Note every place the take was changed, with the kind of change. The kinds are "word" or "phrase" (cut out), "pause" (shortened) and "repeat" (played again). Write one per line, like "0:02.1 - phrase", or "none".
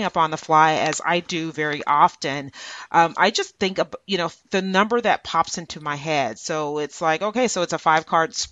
none